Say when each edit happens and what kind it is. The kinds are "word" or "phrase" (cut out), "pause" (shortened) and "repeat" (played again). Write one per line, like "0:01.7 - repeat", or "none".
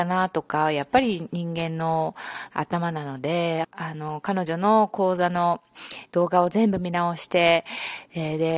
0:03.6 - word